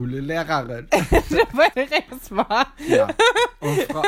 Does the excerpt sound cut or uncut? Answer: cut